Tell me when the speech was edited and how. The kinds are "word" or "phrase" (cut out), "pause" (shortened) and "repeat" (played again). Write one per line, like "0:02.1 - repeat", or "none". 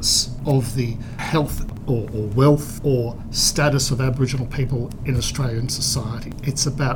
none

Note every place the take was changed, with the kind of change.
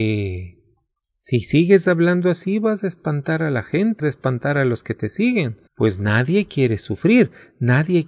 0:04.0 - word
0:05.7 - pause

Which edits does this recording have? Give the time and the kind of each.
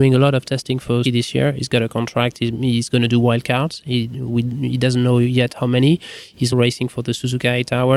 0:01.0 - word
0:06.5 - word

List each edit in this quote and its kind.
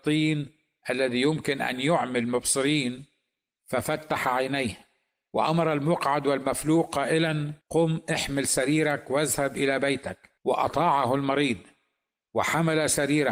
0:07.6 - pause
0:10.4 - pause

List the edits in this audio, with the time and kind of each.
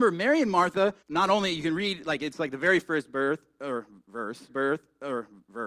0:01.0 - pause
0:04.5 - repeat

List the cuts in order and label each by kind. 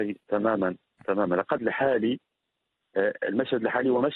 0:01.6 - phrase

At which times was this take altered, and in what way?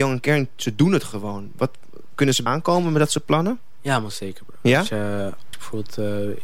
0:02.5 - word
0:05.5 - word

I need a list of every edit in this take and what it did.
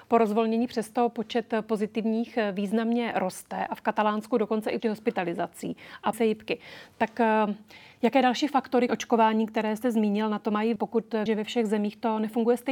0:04.8 - word
0:06.1 - word
0:07.9 - pause
0:08.9 - word
0:10.8 - word
0:11.3 - word

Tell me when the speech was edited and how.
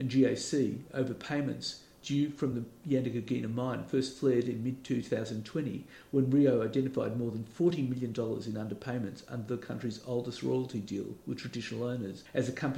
none

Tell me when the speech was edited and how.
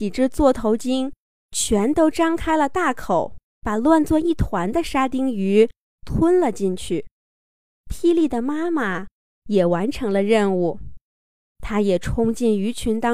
0:03.4 - pause

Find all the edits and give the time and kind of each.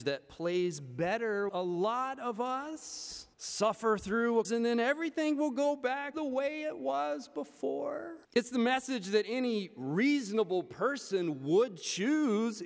0:01.5 - word
0:03.3 - pause
0:04.4 - phrase
0:06.1 - word
0:08.2 - pause

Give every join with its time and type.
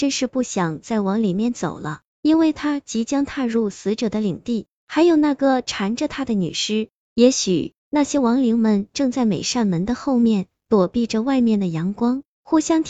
0:07.8 - pause

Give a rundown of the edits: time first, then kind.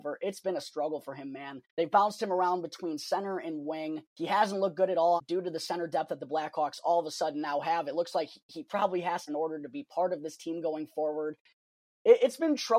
0:01.7 - pause
0:04.1 - pause
0:05.2 - phrase
0:09.3 - phrase

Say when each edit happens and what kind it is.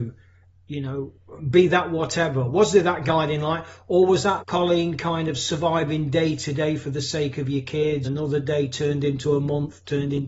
0:04.4 - word
0:08.0 - word

